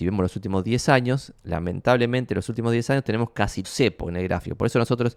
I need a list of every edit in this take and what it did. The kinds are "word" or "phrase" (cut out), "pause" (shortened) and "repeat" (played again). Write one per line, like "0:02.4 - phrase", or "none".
0:01.4 - pause
0:03.6 - word